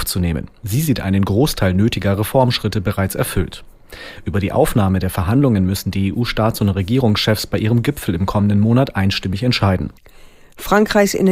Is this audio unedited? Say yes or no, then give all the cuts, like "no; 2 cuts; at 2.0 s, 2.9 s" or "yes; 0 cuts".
yes; 0 cuts